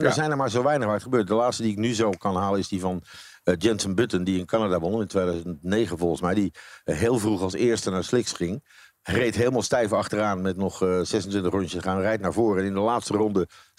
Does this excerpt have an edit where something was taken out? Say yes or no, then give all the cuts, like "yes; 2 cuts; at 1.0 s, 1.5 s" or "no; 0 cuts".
no; 0 cuts